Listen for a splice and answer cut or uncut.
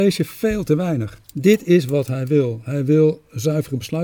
cut